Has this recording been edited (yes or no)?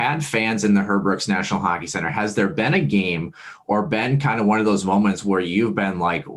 no